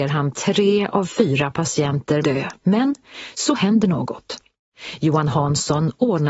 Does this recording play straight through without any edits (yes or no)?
no